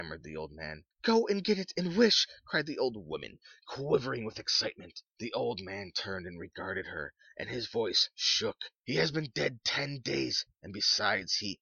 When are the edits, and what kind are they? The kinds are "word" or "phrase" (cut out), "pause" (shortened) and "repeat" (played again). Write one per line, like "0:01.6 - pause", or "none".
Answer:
0:00.9 - pause
0:05.1 - pause
0:08.8 - pause